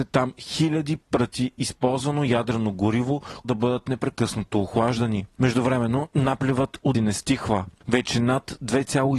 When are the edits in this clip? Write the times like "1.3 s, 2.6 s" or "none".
3.4 s, 6.9 s